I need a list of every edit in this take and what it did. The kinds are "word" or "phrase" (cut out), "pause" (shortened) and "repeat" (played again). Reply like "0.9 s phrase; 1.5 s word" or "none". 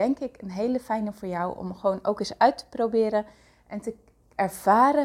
none